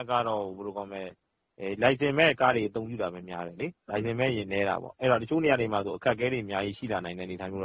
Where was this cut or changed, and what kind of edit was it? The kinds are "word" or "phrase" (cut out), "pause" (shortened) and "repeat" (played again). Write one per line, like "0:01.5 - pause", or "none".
0:03.8 - pause